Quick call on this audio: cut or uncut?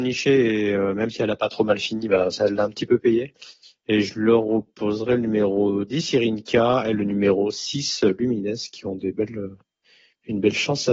uncut